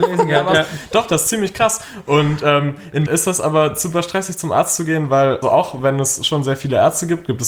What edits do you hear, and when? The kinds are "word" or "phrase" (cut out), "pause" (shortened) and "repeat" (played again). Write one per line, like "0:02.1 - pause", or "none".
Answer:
0:03.1 - word
0:05.4 - word

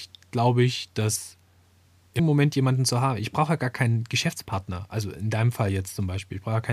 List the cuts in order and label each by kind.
0:02.2 - word

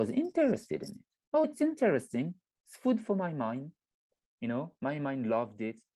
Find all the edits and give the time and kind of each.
0:01.4 - word

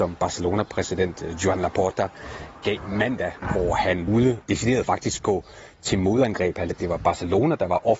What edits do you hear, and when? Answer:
0:04.1 - word
0:04.4 - word
0:04.8 - phrase
0:06.7 - word

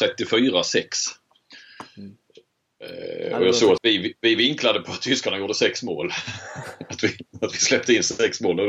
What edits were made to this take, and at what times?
0:03.8 - word

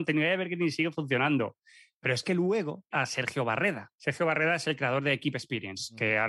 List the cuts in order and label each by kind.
0:02.9 - word
0:03.9 - pause

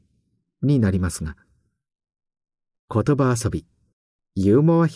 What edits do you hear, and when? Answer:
none

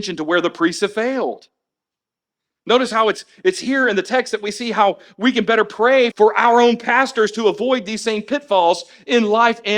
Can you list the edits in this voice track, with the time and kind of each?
0:06.1 - word

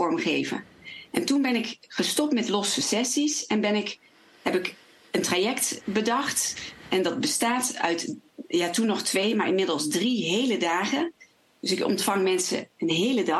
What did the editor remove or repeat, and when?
none

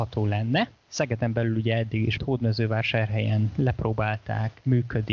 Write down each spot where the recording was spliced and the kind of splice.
0:02.2 - word

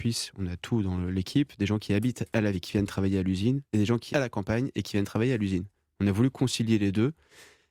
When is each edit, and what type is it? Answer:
0:02.5 - word
0:04.1 - word

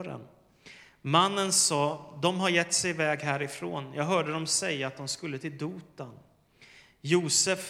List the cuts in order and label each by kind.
none

